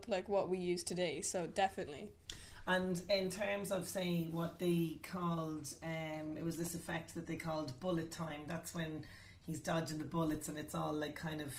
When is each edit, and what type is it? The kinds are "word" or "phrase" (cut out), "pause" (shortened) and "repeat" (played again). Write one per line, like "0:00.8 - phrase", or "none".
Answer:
none